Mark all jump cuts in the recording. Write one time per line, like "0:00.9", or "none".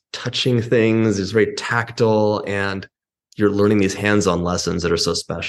none